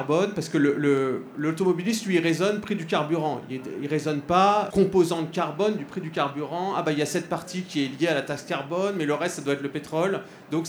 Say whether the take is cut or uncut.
cut